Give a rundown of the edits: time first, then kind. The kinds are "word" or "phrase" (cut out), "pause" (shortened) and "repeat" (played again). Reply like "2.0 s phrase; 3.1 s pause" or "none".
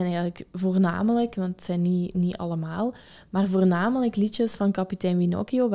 none